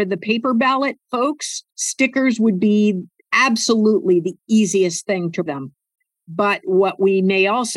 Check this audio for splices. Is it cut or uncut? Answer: cut